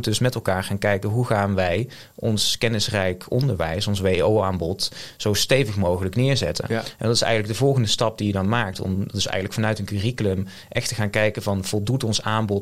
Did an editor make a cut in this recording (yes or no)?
no